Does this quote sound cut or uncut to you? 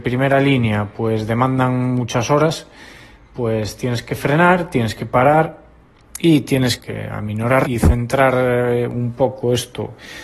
cut